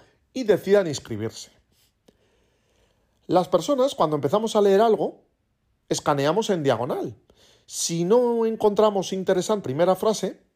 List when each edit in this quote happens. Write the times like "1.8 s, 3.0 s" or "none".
9.6 s